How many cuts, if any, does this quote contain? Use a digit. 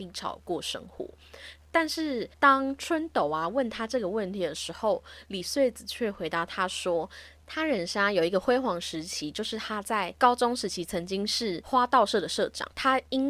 1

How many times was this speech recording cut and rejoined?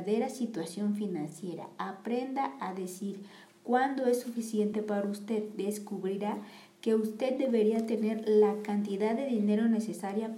0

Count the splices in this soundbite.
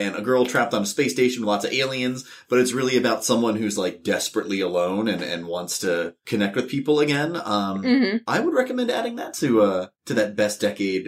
0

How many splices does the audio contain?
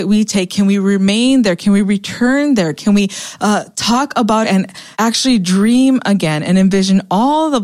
2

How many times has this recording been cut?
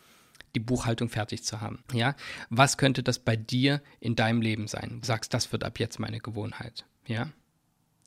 2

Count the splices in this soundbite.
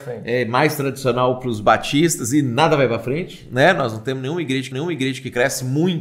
1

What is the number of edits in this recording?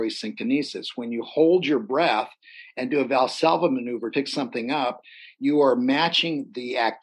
1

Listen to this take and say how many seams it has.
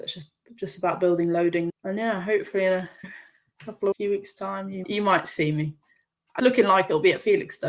5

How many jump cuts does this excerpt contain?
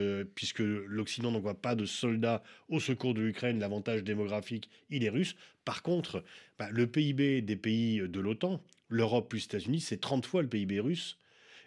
0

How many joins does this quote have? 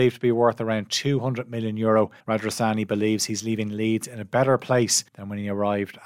2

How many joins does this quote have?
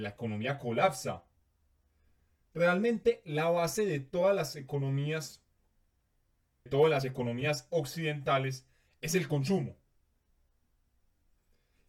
1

